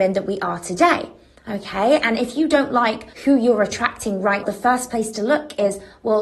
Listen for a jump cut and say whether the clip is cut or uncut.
cut